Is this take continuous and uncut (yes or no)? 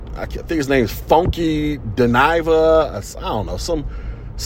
yes